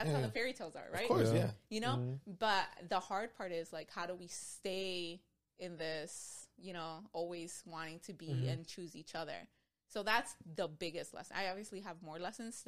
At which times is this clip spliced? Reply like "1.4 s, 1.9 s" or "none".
none